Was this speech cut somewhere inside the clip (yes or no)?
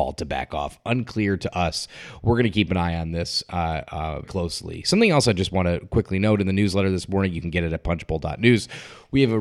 yes